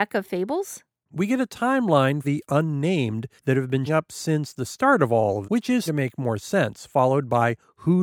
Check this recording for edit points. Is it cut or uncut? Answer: cut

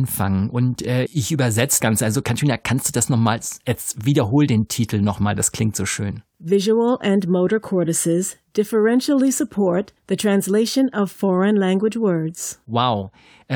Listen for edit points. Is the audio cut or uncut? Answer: cut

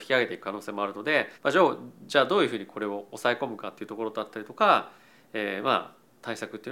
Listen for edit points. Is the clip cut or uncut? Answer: cut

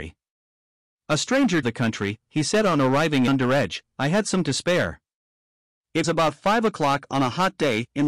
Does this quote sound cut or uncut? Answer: cut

